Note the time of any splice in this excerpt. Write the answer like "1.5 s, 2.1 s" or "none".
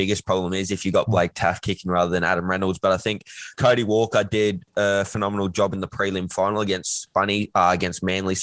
none